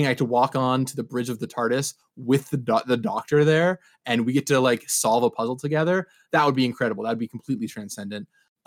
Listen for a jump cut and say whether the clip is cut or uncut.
uncut